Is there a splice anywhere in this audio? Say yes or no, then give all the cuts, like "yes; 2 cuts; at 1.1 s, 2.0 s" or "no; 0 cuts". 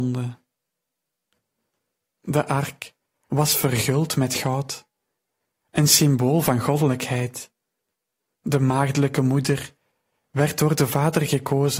no; 0 cuts